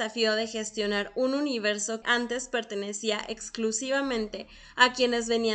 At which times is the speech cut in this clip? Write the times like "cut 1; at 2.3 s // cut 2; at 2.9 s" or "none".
cut 1; at 2.0 s